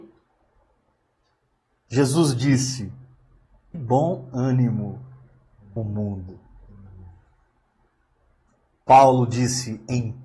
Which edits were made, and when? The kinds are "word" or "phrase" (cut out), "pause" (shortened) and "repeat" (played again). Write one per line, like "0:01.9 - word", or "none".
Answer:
0:03.7 - word
0:05.8 - phrase